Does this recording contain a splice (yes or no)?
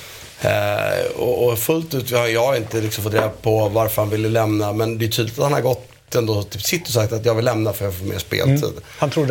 no